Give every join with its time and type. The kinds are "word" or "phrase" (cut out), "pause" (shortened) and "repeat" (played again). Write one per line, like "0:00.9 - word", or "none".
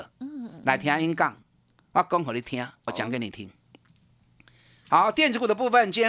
0:02.9 - word

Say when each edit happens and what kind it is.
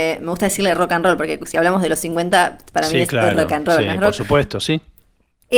none

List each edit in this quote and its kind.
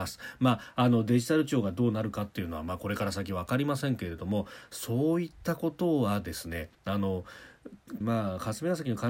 0:06.7 - pause
0:08.0 - phrase

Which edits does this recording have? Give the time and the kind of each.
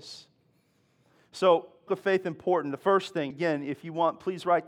0:01.9 - phrase
0:03.3 - word

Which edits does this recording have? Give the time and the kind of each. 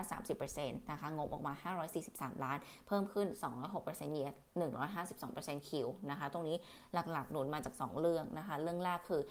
0:04.5 - pause

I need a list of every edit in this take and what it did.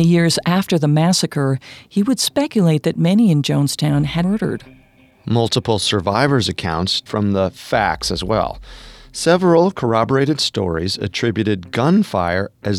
0:04.2 - phrase
0:07.1 - word

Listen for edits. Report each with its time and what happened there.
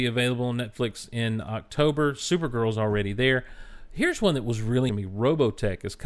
0:04.9 - word

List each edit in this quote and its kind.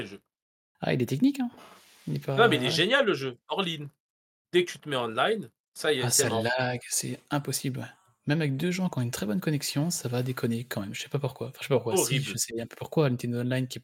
none

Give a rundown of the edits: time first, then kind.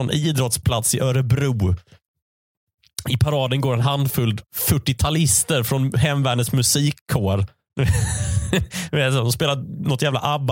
none

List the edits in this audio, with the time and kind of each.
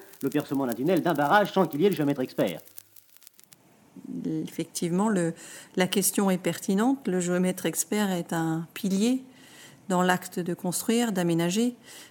none

